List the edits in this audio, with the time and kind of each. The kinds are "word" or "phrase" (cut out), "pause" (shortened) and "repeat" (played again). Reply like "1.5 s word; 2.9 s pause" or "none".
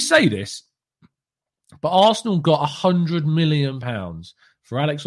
none